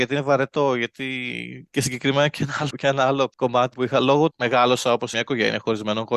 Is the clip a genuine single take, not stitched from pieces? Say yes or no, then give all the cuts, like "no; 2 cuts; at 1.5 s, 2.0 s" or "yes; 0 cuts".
no; 5 cuts; at 1.7 s, 2.7 s, 3.7 s, 4.3 s, 5.1 s